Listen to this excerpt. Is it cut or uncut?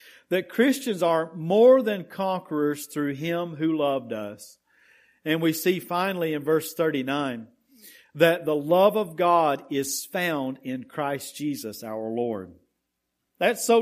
uncut